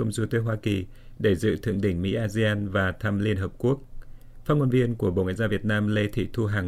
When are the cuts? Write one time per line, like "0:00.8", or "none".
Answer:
none